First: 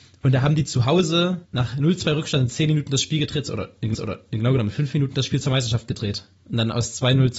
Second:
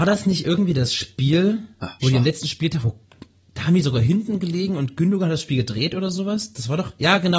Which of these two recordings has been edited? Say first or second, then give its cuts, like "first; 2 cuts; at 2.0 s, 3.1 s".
first; 2 cuts; at 1.4 s, 3.9 s